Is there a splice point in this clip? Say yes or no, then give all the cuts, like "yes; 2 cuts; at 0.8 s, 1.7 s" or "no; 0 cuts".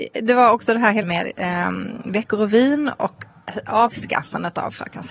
yes; 1 cut; at 1.0 s